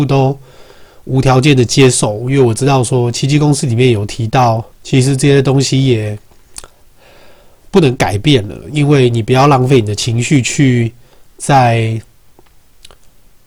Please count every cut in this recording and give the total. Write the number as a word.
one